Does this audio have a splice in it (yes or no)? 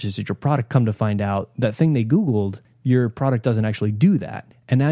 no